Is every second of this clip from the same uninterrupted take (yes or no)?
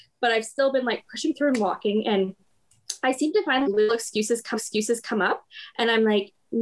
no